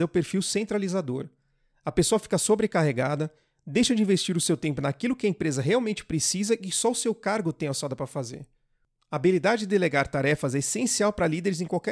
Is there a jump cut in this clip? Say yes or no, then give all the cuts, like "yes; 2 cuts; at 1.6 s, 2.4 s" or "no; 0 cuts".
no; 0 cuts